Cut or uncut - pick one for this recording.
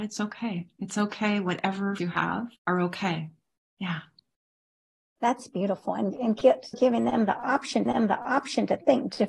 cut